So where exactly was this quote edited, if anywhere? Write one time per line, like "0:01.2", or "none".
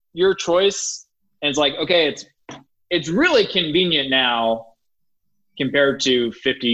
none

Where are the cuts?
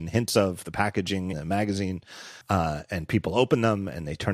0:01.3
0:02.4

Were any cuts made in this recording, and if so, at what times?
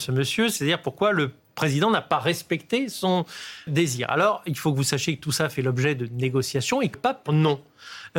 0:03.7
0:06.9
0:07.3

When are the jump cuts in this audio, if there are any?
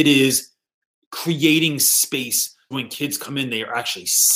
0:02.7

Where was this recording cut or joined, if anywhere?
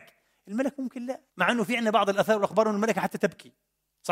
0:01.3

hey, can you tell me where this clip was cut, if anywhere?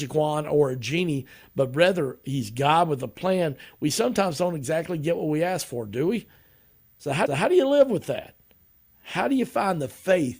0:07.3

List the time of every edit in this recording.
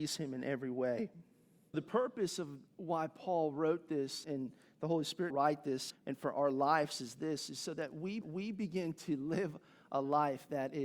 0:01.7
0:02.7
0:04.2
0:05.3
0:05.9
0:08.2

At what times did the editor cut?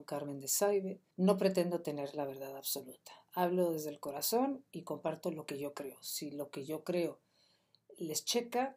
0:01.1

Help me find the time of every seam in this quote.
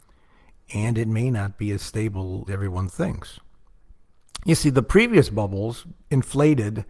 0:02.5

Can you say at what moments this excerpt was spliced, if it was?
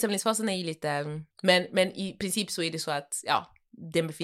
0:01.3

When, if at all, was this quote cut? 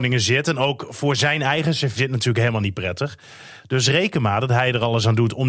0:02.0

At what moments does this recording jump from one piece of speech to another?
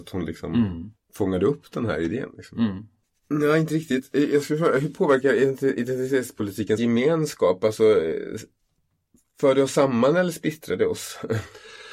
0:01.0
0:06.8

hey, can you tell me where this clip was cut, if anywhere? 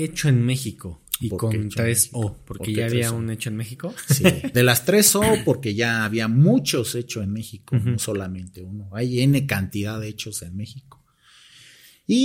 0:04.5

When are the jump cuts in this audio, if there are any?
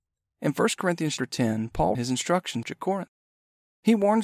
0:01.2
0:01.9
0:02.6

